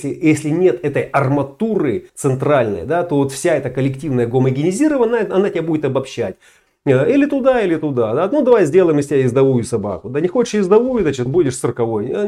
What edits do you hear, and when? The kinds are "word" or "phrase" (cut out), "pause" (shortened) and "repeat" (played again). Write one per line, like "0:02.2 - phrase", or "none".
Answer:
0:02.1 - pause
0:11.3 - word